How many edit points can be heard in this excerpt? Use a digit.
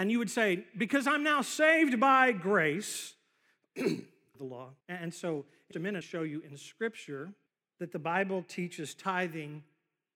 5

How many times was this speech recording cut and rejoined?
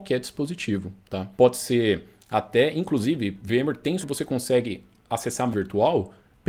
3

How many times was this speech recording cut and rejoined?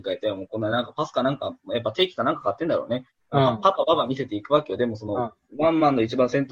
0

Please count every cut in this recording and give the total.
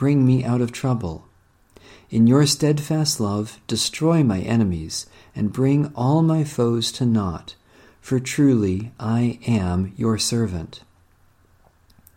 0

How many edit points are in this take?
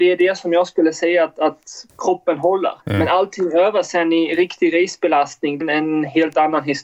2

